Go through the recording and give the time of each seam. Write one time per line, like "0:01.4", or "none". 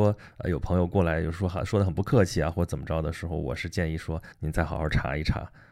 0:04.3